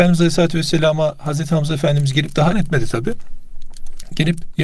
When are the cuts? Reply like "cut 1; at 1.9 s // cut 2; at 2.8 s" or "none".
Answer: cut 1; at 2.5 s